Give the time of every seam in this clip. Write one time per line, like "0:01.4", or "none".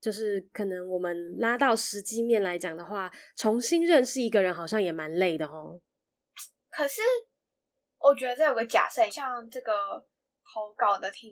0:09.1